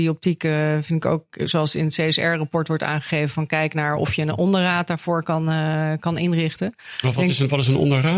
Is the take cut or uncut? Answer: uncut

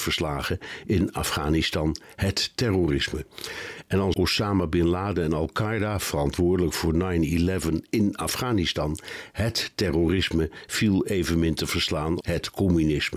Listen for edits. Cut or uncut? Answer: cut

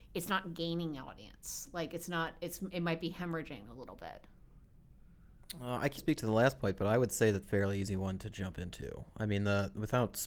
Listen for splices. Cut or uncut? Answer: cut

